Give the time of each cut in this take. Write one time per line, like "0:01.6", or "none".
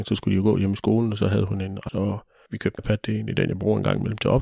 0:01.9
0:02.5
0:02.8